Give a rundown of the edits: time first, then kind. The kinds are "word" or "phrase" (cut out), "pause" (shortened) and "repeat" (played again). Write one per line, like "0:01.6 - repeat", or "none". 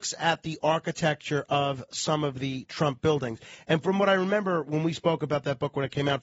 none